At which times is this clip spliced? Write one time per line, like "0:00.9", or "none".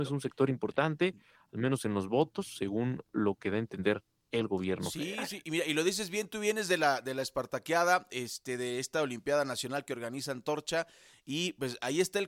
none